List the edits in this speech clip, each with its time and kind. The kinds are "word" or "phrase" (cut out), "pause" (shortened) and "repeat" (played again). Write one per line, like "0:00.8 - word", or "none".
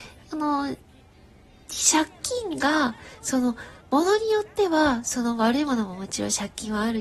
0:03.8 - pause